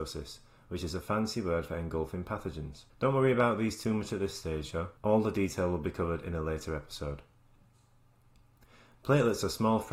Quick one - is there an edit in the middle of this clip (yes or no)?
yes